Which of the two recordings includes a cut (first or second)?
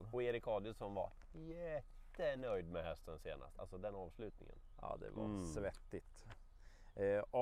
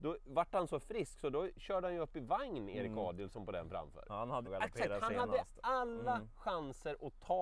second